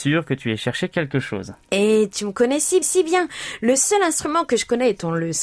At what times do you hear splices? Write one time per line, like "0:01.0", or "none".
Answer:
0:02.8